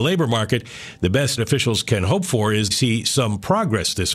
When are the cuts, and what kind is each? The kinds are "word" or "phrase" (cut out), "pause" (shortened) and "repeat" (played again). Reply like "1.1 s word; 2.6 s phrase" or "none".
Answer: 1.4 s word; 2.7 s word